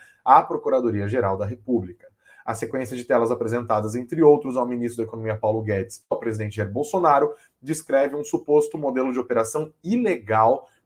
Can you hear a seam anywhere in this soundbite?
no; 0 cuts

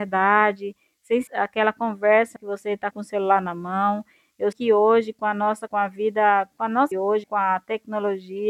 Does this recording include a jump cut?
yes; 7 cuts; at 1.3 s, 2.4 s, 2.9 s, 4.5 s, 5.7 s, 6.9 s, 7.2 s

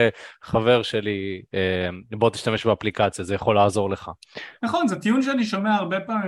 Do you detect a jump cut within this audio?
no; 0 cuts

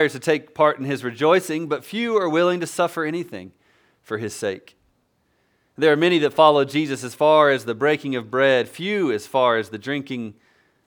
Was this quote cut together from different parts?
no; 0 cuts

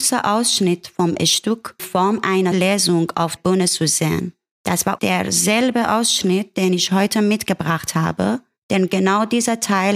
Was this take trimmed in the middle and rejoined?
yes; 4 cuts; at 1.8 s, 2.5 s, 3.4 s, 5.0 s

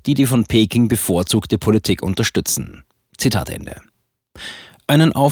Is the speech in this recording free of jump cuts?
yes; 0 cuts

